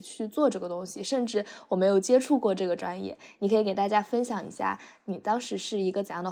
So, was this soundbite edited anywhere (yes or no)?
no